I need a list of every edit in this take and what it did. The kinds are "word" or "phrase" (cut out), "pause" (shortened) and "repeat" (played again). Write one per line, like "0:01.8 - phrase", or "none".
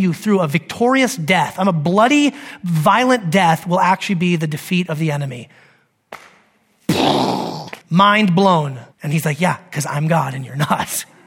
0:07.8 - pause
0:08.9 - pause